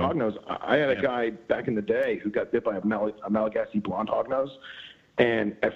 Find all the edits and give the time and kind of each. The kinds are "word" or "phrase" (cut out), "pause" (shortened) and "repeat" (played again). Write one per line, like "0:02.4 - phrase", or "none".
0:02.8 - word

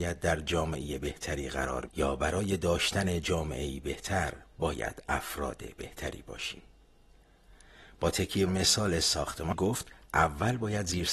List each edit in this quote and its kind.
0:01.9 - word
0:08.5 - word
0:09.5 - word

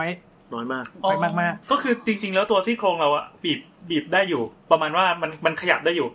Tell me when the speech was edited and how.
0:01.6 - pause

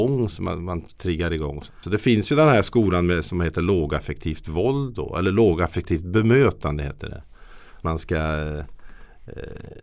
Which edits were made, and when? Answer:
0:01.7 - word
0:07.8 - word

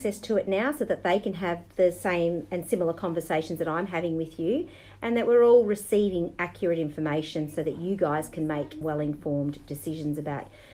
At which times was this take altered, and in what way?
0:08.8 - word

